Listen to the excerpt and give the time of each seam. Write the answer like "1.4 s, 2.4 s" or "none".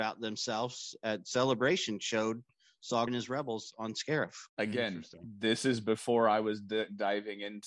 3.1 s, 4.5 s